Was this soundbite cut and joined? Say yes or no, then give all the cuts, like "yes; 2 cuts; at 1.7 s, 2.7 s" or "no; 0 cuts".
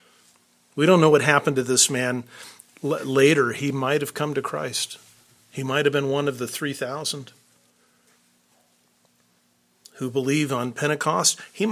no; 0 cuts